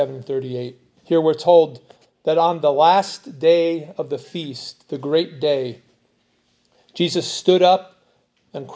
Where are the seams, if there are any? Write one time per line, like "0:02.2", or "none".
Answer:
0:01.0